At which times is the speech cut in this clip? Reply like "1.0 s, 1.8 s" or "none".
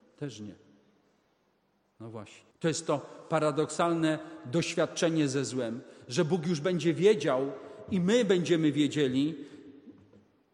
2.5 s